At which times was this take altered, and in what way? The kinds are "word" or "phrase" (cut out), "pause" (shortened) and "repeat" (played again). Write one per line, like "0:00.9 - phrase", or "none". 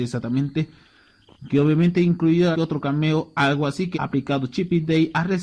0:02.5 - word
0:03.9 - word

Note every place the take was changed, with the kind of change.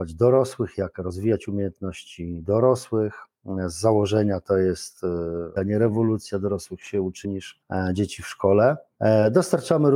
0:05.6 - word
0:07.2 - word

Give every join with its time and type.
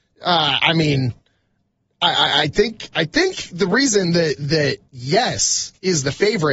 none

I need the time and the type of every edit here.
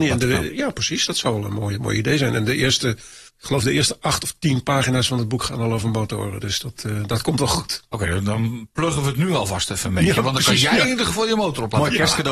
0:03.3 - pause

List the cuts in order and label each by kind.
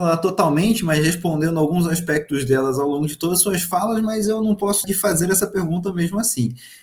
0:04.8 - word

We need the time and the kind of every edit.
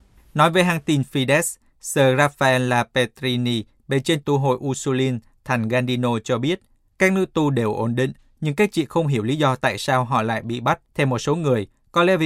0:04.2 - phrase
0:06.9 - pause
0:10.8 - pause

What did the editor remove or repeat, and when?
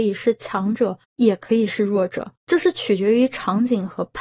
0:01.0 - pause
0:02.4 - pause

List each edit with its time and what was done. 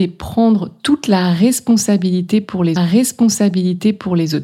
0:02.8 - repeat

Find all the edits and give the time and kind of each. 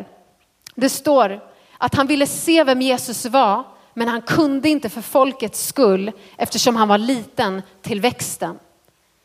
none

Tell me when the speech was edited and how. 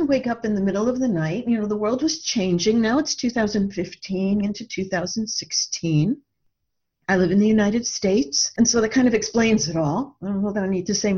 0:04.4 - word

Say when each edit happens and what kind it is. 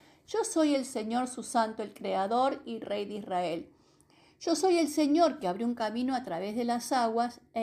none

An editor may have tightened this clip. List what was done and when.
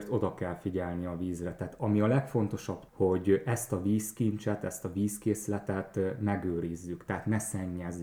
0:02.9 - word

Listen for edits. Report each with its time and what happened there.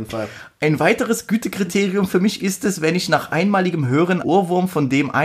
0:04.2 - word

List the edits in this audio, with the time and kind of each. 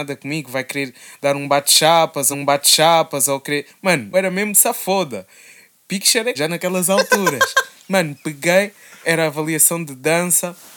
0:02.3 - repeat
0:04.1 - word
0:06.4 - word
0:09.0 - word

